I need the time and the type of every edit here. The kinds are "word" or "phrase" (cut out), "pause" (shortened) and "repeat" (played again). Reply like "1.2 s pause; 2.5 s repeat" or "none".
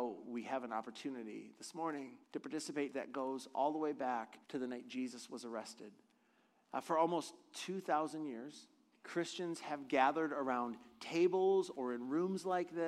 2.2 s pause; 2.9 s phrase; 4.4 s pause

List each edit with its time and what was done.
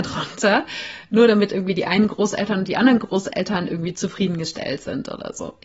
none

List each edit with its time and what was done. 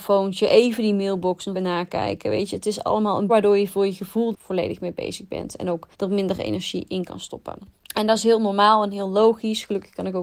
1.5 s word; 3.3 s phrase; 4.3 s phrase; 5.9 s pause; 7.8 s pause

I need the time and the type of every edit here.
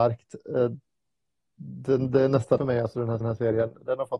2.6 s phrase; 3.2 s repeat

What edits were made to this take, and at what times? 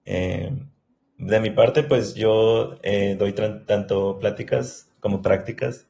none

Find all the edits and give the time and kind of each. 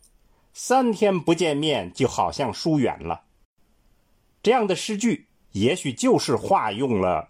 3.4 s pause

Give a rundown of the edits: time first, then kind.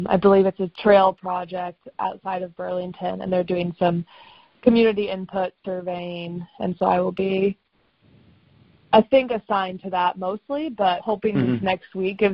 11.0 s word

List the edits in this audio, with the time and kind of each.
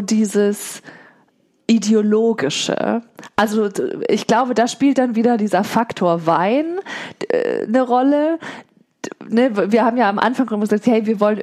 none

